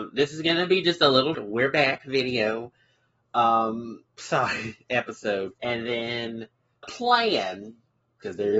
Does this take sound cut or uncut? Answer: cut